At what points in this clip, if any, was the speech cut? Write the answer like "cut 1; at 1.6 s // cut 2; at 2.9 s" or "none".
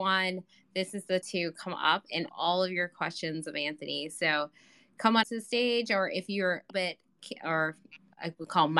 cut 1; at 1.2 s // cut 2; at 2.3 s // cut 3; at 5.2 s // cut 4; at 6.7 s